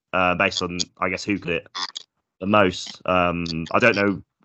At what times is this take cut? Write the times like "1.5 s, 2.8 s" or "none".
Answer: 1.4 s